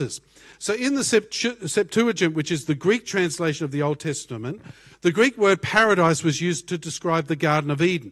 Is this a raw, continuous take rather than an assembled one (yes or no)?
yes